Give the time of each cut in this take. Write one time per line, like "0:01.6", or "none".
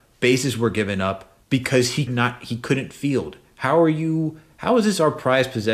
0:01.4
0:02.1